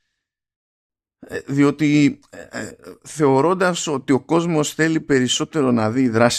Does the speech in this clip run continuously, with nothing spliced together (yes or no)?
yes